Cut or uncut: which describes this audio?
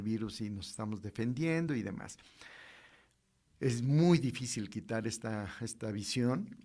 uncut